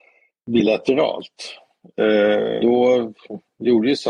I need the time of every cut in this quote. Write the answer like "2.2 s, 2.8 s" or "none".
2.6 s